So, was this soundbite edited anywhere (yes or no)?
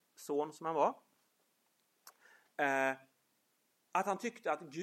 no